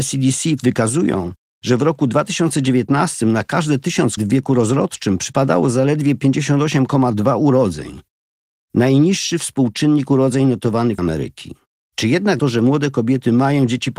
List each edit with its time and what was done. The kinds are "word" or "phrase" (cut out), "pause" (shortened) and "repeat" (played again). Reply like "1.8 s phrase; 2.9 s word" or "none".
4.2 s word; 11.0 s word; 11.7 s pause; 12.4 s phrase